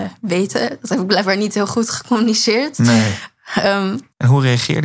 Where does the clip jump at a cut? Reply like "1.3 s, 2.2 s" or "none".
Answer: none